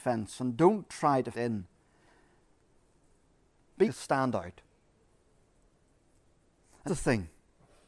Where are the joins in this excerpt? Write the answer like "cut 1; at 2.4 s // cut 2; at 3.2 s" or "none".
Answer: cut 1; at 1.3 s // cut 2; at 3.8 s // cut 3; at 6.9 s